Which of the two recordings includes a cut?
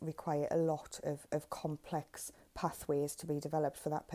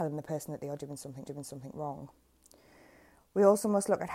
second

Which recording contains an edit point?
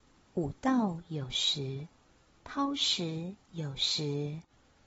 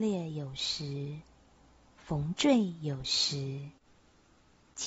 first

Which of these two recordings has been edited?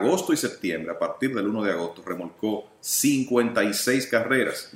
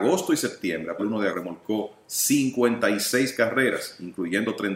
second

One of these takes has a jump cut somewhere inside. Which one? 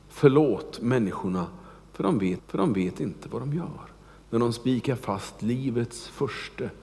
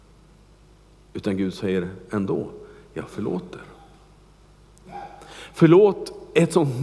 first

